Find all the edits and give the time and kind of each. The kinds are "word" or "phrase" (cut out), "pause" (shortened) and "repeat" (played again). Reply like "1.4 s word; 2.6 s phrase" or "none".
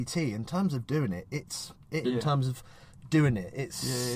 2.0 s phrase